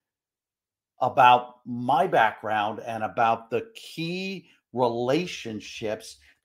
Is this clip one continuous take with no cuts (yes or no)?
yes